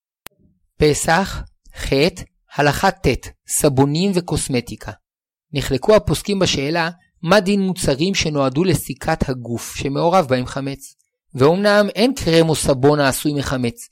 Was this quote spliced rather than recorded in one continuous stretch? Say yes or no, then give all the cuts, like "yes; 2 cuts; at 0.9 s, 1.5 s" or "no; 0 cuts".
no; 0 cuts